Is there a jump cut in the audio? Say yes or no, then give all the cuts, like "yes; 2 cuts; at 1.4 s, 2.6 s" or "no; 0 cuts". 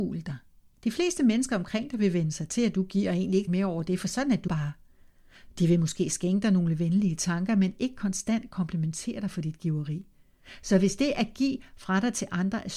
yes; 2 cuts; at 3.5 s, 4.5 s